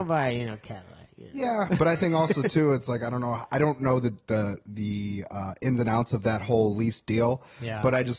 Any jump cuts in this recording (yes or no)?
no